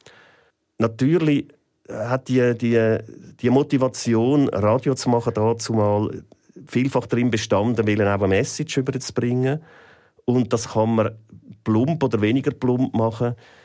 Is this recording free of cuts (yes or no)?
yes